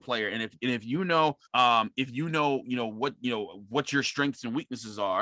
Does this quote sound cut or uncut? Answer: cut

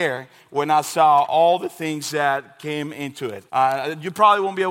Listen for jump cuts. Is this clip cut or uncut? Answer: cut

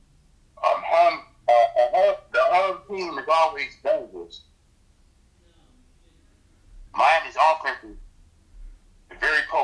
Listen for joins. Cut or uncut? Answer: cut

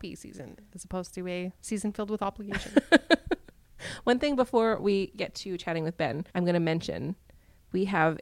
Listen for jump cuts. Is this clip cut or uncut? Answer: cut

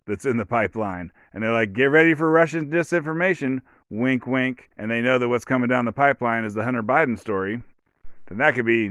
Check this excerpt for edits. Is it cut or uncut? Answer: cut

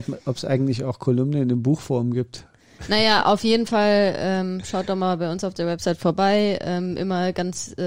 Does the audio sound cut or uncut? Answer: uncut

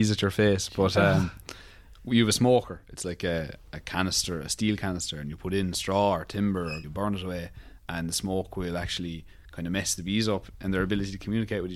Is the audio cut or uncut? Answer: cut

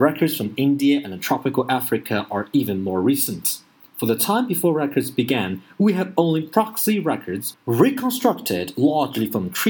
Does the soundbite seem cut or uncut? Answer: uncut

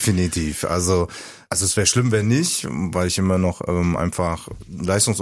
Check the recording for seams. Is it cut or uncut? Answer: uncut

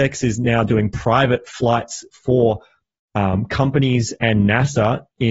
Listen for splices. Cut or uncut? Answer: uncut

